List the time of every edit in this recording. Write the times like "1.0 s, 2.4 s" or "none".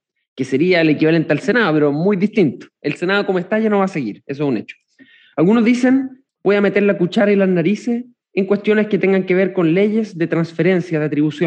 6.3 s